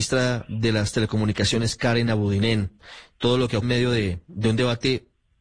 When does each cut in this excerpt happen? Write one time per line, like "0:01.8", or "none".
0:03.6